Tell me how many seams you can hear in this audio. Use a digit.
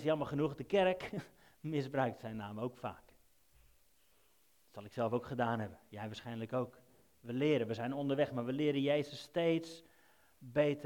0